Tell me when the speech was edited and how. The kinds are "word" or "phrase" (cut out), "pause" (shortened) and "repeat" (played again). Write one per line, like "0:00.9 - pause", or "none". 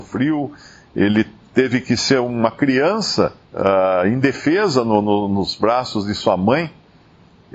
0:03.4 - pause